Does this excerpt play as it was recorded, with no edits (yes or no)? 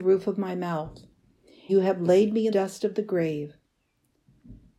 no